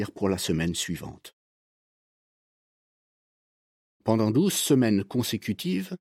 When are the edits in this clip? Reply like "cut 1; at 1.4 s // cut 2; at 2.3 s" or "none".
none